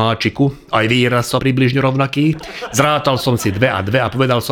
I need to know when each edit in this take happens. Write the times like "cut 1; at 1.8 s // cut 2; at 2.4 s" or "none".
cut 1; at 1.4 s